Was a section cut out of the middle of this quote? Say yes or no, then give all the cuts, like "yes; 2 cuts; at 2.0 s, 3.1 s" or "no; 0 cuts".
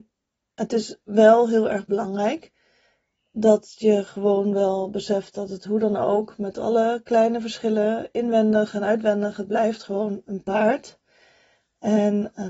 no; 0 cuts